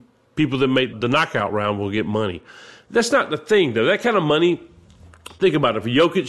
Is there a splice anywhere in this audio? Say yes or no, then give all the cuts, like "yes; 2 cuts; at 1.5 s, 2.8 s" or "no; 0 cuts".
no; 0 cuts